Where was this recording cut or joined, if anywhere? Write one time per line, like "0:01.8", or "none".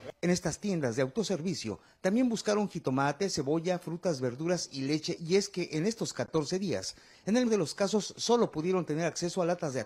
0:07.5